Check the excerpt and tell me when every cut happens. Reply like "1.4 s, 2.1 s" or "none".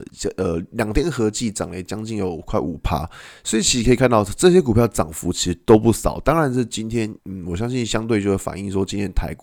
7.2 s